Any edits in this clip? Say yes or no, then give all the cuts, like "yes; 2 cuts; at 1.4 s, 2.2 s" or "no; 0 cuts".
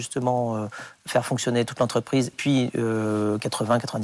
yes; 1 cut; at 2.3 s